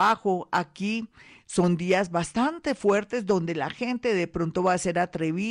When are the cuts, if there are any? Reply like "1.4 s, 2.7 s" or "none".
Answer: none